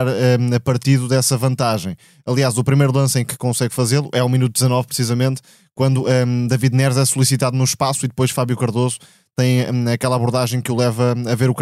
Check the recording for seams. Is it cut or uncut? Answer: uncut